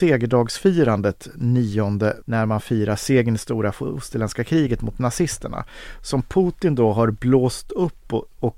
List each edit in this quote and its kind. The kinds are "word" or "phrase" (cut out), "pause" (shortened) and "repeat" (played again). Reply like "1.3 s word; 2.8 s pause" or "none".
2.2 s word